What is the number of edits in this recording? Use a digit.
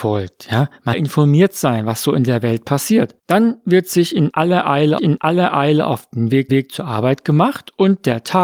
4